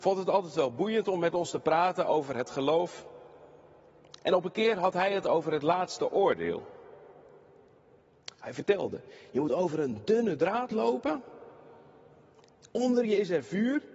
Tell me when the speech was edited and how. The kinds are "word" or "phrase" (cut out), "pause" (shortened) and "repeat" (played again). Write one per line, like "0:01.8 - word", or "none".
none